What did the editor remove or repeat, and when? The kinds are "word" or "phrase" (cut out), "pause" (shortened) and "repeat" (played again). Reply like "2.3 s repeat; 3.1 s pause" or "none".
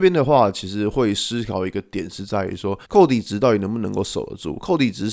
2.8 s pause